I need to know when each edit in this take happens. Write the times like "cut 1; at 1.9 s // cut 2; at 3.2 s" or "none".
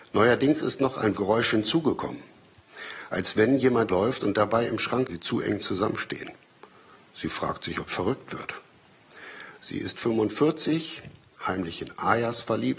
cut 1; at 1.1 s // cut 2; at 3.9 s // cut 3; at 5.1 s // cut 4; at 7.9 s